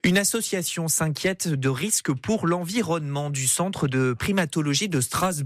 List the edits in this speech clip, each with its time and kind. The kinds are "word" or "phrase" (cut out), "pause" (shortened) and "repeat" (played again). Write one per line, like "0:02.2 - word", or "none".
none